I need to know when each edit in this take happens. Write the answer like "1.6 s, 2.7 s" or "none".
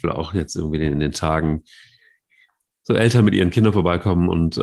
none